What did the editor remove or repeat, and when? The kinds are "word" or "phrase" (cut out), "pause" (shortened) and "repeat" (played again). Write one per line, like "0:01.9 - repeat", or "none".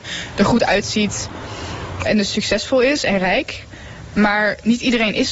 0:02.1 - word